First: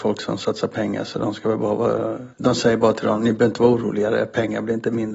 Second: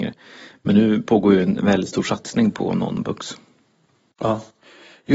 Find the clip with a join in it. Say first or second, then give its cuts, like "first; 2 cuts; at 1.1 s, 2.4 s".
first; 1 cut; at 2.3 s